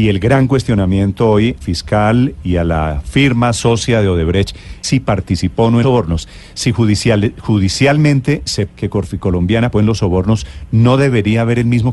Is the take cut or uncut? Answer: cut